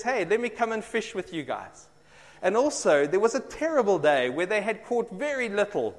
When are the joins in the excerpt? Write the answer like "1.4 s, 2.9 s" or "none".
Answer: none